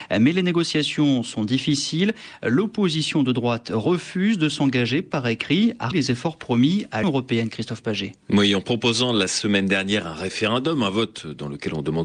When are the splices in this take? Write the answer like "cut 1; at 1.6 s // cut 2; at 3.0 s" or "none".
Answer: cut 1; at 5.9 s // cut 2; at 7.0 s

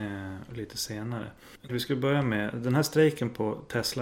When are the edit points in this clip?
cut 1; at 1.7 s

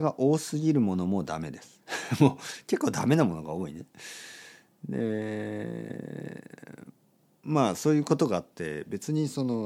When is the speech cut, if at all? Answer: none

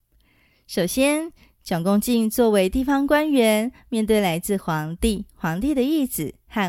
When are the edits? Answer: none

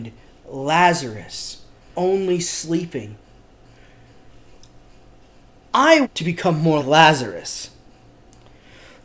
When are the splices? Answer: cut 1; at 1.9 s // cut 2; at 6.0 s // cut 3; at 6.8 s

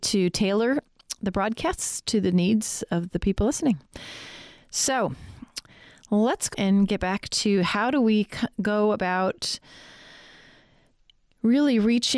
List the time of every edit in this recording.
cut 1; at 6.5 s

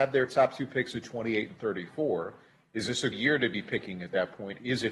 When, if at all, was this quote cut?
cut 1; at 3.1 s

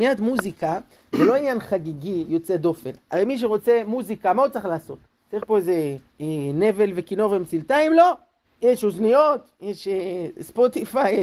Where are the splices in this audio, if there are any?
cut 1; at 5.1 s // cut 2; at 6.1 s // cut 3; at 8.4 s // cut 4; at 9.5 s

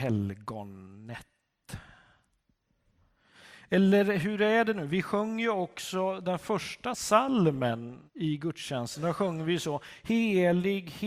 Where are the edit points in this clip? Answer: cut 1; at 8.1 s

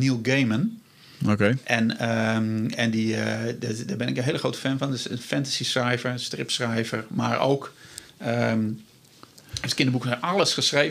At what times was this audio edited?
none

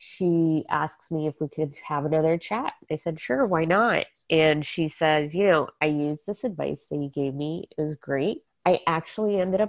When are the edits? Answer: cut 1; at 8.5 s

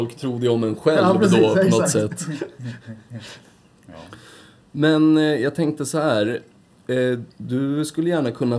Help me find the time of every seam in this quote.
cut 1; at 7.3 s

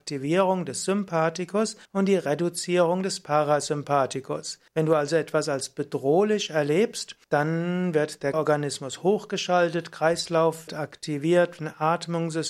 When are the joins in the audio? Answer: cut 1; at 1.8 s // cut 2; at 4.7 s // cut 3; at 7.2 s // cut 4; at 8.3 s // cut 5; at 10.7 s

